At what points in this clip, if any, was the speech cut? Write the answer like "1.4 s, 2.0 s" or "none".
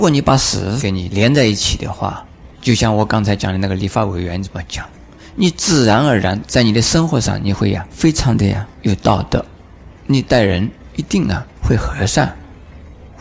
2.5 s, 7.9 s, 10.0 s